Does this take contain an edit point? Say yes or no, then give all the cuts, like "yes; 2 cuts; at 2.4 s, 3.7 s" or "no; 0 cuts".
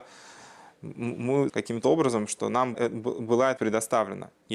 yes; 3 cuts; at 1.5 s, 2.7 s, 3.6 s